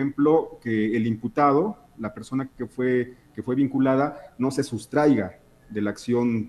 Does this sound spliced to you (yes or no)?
no